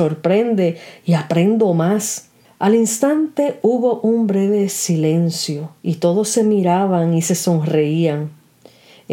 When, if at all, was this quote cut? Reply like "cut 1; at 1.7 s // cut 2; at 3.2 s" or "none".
cut 1; at 2.4 s // cut 2; at 5.8 s